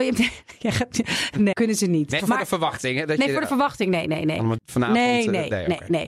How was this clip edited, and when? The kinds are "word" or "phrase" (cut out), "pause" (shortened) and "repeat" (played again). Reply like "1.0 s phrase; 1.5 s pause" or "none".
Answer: 1.5 s word; 2.2 s word; 4.6 s word

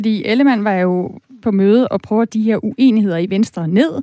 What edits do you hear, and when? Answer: 1.4 s phrase; 2.3 s word

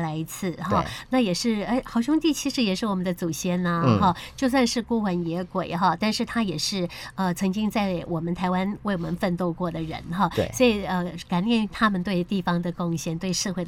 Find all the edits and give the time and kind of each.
none

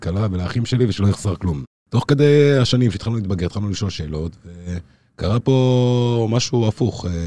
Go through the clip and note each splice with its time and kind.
none

